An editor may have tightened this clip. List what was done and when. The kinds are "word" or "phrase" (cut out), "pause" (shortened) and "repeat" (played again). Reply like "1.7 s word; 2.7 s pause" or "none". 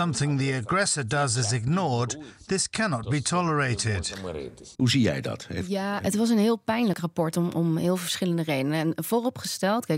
4.7 s pause

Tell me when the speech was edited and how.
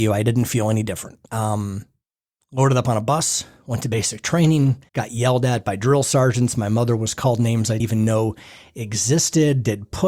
1.3 s pause; 4.9 s pause; 7.8 s word

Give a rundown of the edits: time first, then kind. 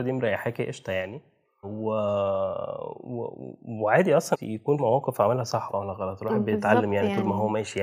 1.6 s word; 4.3 s word; 4.8 s word; 5.7 s word

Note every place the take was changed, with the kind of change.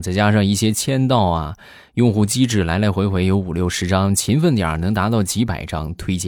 none

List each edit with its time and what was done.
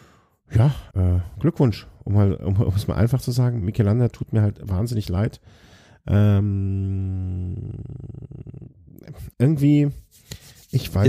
0.9 s word; 9.3 s pause

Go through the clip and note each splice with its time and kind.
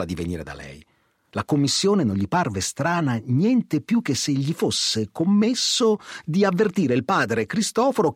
none

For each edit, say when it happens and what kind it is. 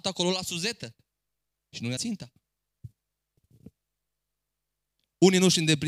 2.0 s word

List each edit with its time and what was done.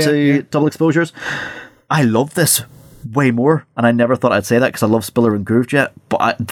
none

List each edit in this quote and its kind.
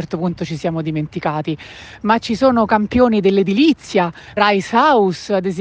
4.4 s word

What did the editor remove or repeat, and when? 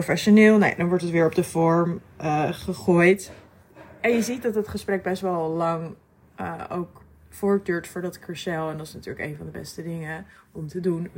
none

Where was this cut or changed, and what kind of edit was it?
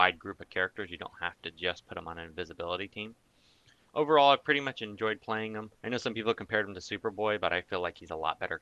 5.7 s pause

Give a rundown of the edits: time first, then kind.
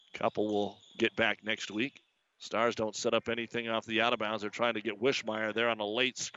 none

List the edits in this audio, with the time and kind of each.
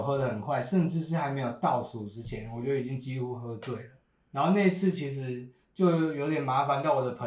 none

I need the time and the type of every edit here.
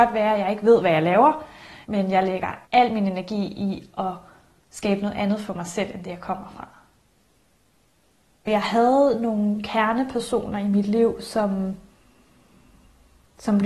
1.8 s pause; 2.6 s pause

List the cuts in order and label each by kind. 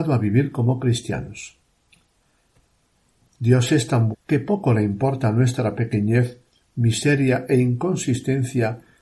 4.1 s word

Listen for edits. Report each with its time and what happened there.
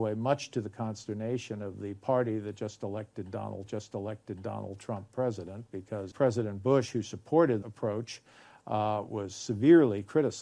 3.7 s repeat; 6.1 s word; 7.6 s word

